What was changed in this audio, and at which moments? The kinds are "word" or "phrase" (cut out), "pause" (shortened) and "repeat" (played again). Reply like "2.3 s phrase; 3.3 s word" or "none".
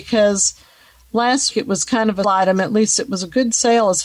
1.5 s word; 2.2 s word